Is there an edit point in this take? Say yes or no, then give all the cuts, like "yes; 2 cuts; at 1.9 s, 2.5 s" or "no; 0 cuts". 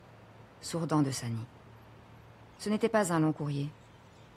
no; 0 cuts